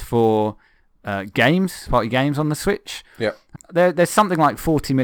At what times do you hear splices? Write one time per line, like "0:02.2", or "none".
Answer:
0:01.9
0:03.6